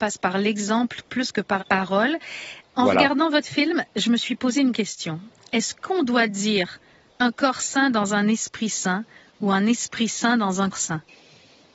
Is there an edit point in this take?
yes; 3 cuts; at 1.6 s, 4.7 s, 10.7 s

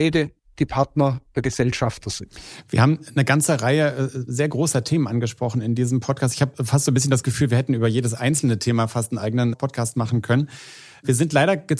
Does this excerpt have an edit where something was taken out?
no; 0 cuts

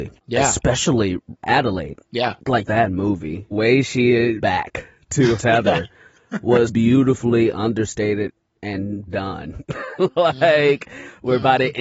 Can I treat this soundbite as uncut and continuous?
no; 7 cuts; at 2.6 s, 3.5 s, 4.4 s, 5.4 s, 6.7 s, 9.1 s, 10.0 s

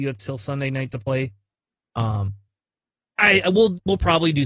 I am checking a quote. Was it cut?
no; 0 cuts

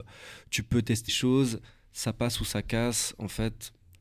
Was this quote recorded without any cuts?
no; 1 cut; at 1.1 s

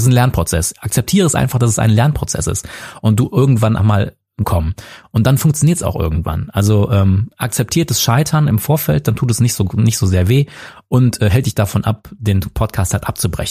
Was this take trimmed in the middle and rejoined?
yes; 2 cuts; at 3.8 s, 4.4 s

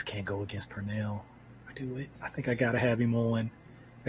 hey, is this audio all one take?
no; 2 cuts; at 1.7 s, 2.1 s

